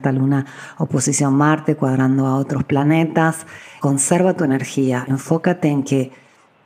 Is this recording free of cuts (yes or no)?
yes